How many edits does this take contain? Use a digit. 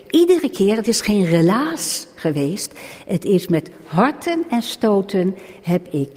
0